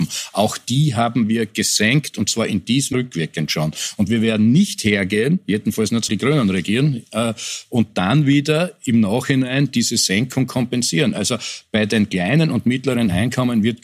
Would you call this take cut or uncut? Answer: cut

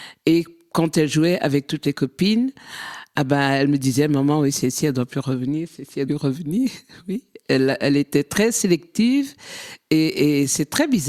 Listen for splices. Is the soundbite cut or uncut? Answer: cut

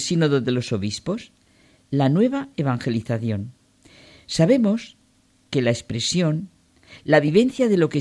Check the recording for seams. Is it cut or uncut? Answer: uncut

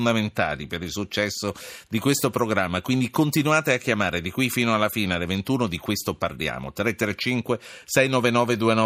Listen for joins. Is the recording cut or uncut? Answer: uncut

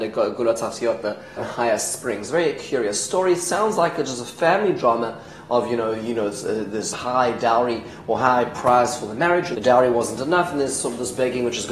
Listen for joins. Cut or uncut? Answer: cut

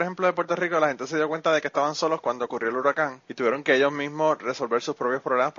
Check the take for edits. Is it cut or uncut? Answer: cut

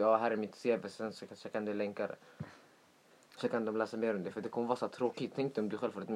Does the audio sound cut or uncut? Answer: uncut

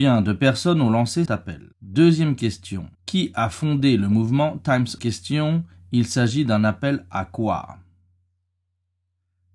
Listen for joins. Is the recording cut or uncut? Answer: cut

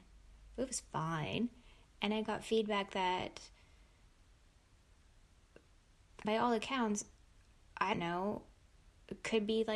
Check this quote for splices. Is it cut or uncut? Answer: cut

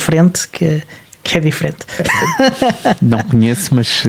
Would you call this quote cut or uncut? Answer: uncut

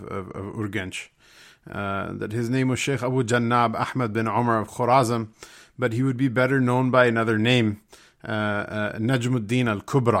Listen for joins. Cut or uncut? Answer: uncut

